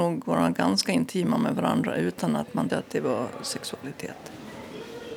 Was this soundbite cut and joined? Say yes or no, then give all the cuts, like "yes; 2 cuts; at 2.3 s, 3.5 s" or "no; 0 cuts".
yes; 1 cut; at 2.7 s